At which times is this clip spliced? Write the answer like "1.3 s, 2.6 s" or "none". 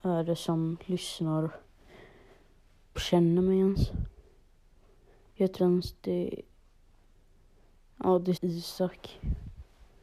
2.9 s, 5.6 s, 8.4 s